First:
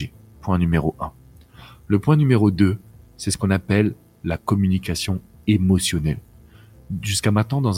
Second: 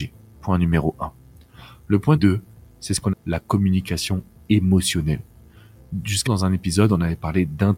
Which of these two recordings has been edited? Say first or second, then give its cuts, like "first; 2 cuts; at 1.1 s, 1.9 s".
second; 3 cuts; at 2.2 s, 3.1 s, 6.3 s